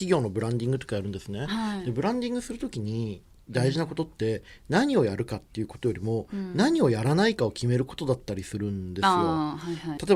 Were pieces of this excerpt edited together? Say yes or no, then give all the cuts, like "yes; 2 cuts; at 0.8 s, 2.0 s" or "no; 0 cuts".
no; 0 cuts